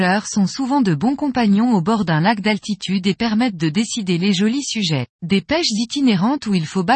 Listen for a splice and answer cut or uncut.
cut